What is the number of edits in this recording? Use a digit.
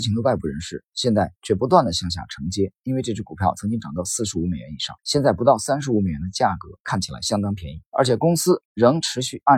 5